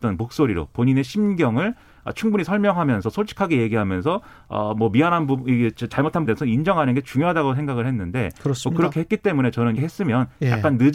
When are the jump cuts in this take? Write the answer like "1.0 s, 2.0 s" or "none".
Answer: 6.3 s, 9.8 s